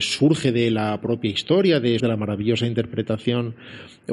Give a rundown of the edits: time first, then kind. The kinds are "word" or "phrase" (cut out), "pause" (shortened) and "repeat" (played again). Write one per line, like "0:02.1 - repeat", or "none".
0:02.0 - phrase